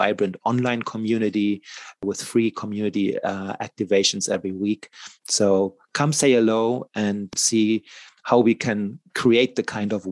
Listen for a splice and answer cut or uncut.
uncut